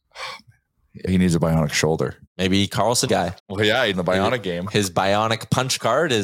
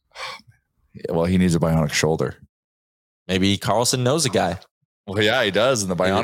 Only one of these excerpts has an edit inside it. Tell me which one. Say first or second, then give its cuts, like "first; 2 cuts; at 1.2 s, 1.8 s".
first; 5 cuts; at 1.1 s, 2.3 s, 3.1 s, 3.4 s, 3.9 s